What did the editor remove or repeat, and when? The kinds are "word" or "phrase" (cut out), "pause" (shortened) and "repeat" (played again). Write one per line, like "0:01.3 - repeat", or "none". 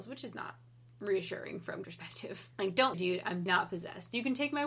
0:01.8 - word
0:02.5 - pause
0:02.9 - word
0:03.5 - word